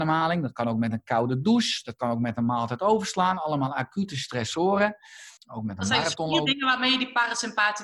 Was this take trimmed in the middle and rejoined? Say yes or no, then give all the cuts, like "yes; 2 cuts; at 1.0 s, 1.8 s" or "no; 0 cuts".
yes; 1 cut; at 5.4 s